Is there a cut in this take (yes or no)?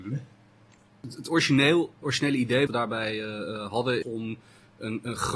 yes